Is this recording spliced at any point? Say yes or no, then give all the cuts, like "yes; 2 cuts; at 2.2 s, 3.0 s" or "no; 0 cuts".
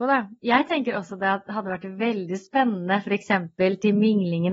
no; 0 cuts